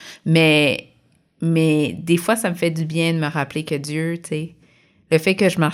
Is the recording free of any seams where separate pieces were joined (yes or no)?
yes